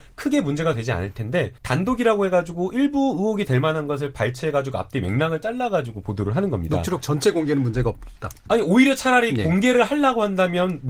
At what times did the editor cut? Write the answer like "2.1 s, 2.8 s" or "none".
1.6 s